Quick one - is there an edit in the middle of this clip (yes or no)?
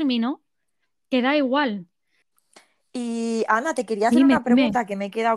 no